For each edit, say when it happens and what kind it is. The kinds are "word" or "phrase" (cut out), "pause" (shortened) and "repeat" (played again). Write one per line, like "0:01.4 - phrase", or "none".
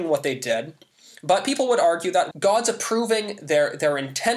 0:02.3 - word

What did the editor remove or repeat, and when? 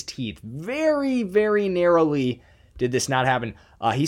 none

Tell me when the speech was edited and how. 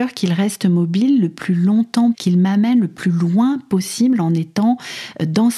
0:02.1 - word

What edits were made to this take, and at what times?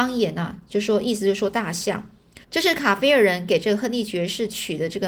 0:02.4 - pause

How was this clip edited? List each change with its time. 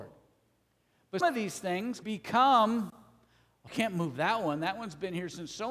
0:01.2 - word
0:02.0 - word
0:03.7 - word

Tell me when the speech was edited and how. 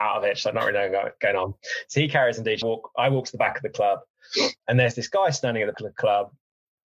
0:02.6 - word
0:05.7 - word

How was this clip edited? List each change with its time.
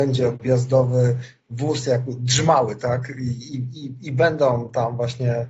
none

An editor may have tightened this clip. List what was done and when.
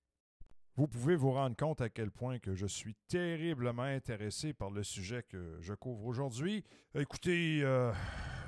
0:06.8 - pause

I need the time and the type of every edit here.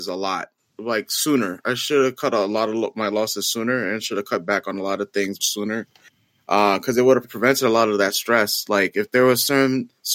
0:05.4 - word
0:07.2 - word

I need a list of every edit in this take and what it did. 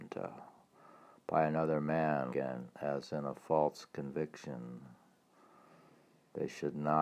0:02.3 - word

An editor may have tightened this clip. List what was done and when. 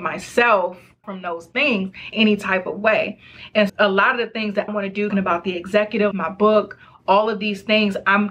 0:01.0 - word
0:02.1 - word
0:03.7 - word
0:04.7 - word
0:05.1 - word
0:06.1 - word

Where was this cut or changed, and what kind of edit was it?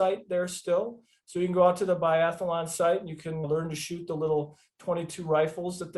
0:03.4 - word

